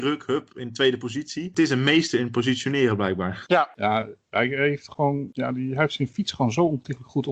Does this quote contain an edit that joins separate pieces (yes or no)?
yes